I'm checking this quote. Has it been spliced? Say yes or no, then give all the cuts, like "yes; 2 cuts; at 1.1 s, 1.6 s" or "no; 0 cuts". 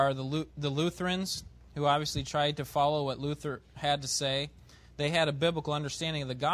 no; 0 cuts